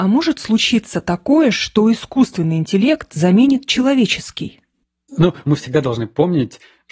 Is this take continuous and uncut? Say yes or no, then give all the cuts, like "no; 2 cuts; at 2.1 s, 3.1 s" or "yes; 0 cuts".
yes; 0 cuts